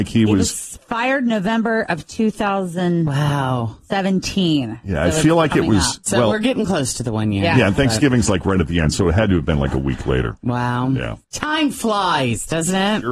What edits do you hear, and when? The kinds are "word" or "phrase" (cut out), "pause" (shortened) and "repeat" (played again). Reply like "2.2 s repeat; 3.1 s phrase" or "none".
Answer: 11.2 s pause

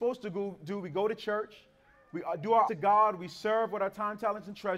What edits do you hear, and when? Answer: 2.7 s word

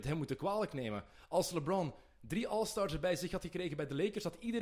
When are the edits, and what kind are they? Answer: none

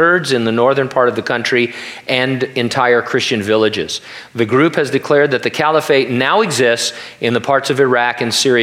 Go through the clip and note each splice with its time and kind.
none

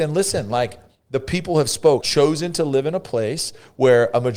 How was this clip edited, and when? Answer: 2.0 s word

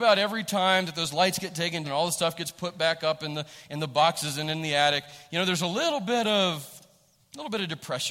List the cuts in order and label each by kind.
1.8 s word

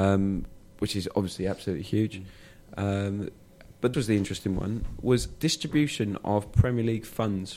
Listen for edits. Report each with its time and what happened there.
3.9 s word

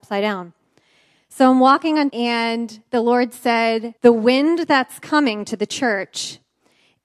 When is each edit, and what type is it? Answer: 2.1 s word; 4.0 s pause

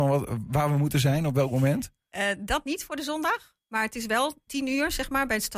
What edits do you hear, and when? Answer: 3.6 s pause; 4.5 s word

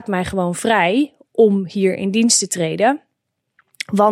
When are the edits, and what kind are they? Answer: none

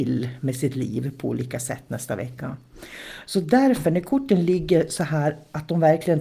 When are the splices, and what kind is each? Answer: none

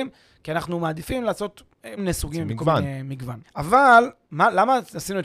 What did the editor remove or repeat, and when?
2.0 s word; 3.4 s pause

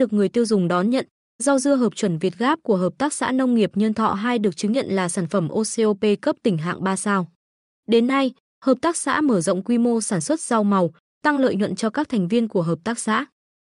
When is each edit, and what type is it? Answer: none

